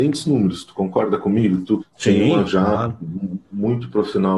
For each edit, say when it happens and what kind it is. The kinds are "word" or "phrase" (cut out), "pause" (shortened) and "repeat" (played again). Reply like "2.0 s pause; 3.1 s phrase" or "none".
1.8 s word; 2.5 s word